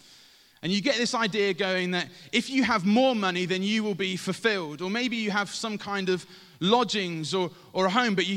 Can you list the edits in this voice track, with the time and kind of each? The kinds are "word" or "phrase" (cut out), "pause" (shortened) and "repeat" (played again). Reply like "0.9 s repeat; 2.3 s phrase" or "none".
none